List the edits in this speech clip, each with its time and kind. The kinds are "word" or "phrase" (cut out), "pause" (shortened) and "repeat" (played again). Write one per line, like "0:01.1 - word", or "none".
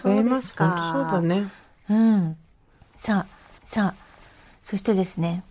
0:03.6 - repeat